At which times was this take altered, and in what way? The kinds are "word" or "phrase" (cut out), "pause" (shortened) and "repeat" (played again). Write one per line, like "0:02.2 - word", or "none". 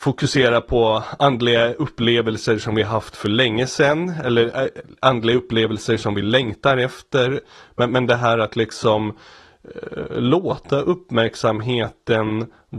none